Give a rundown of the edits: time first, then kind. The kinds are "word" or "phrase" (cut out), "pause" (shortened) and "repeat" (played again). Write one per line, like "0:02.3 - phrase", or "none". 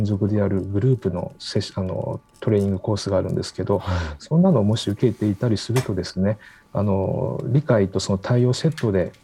none